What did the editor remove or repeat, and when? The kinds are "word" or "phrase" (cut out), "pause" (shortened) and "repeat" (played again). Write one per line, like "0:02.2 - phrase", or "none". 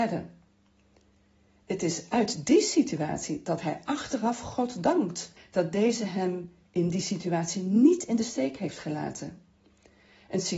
0:05.4 - pause